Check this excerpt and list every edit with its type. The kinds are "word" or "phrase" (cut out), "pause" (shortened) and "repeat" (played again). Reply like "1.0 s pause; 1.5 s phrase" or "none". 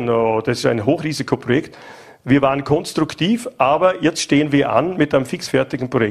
none

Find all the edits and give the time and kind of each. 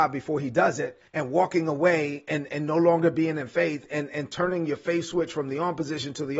1.1 s pause

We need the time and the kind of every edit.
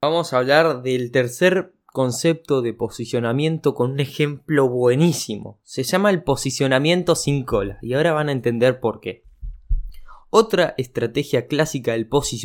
none

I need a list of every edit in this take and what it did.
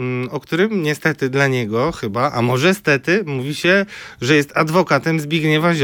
none

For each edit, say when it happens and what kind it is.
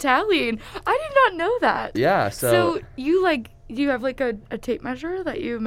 4.5 s word

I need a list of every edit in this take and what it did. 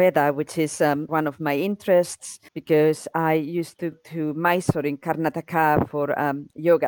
1.1 s word; 2.5 s pause; 3.9 s word

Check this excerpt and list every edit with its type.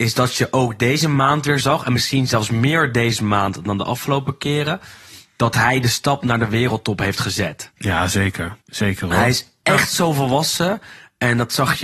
8.6 s pause

